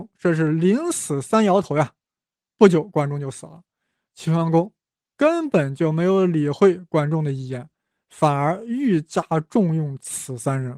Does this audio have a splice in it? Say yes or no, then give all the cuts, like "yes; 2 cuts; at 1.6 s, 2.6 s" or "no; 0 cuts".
no; 0 cuts